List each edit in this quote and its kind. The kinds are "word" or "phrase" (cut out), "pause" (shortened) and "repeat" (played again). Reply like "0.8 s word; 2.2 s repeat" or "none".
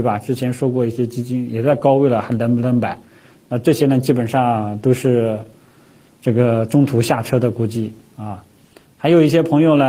none